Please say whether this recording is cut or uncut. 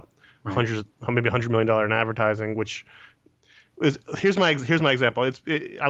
uncut